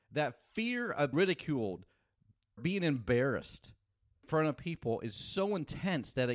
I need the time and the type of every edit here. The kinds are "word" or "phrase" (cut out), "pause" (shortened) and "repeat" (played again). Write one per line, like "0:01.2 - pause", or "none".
0:01.1 - word
0:02.6 - word
0:04.2 - word

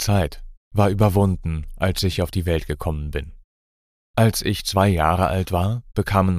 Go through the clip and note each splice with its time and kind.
none

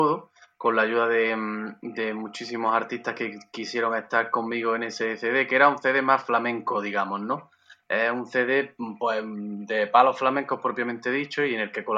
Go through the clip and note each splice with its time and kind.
none

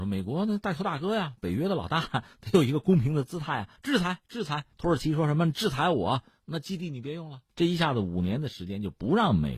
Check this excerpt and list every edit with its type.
0:03.8 - pause
0:04.7 - pause
0:07.5 - pause

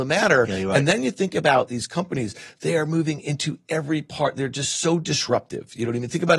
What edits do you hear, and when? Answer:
none

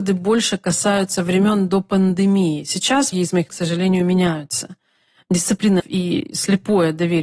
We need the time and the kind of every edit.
0:03.1 - word
0:03.5 - word
0:05.8 - word

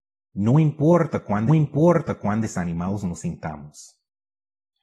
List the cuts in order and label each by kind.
0:01.5 - repeat

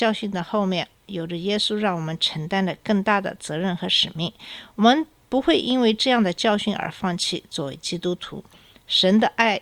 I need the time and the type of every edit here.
none

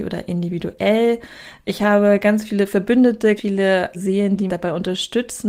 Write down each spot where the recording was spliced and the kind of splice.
0:03.4 - word
0:03.9 - word
0:04.5 - word

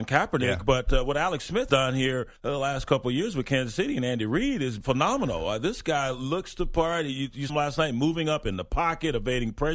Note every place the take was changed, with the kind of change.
0:01.7 - word
0:02.4 - pause
0:04.8 - word
0:07.5 - word

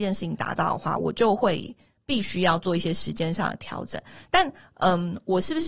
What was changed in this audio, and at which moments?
none

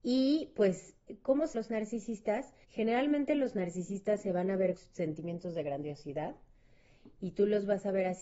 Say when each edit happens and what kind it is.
0:01.5 - word
0:02.6 - pause
0:04.8 - word

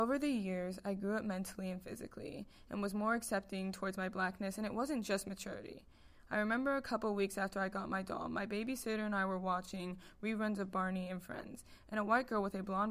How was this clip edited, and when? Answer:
none

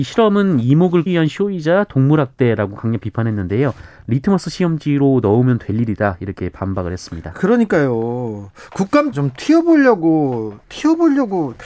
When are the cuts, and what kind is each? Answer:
0:01.1 - word
0:09.1 - word
0:10.6 - pause

